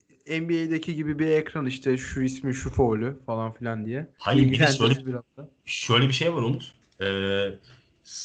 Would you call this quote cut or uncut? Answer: cut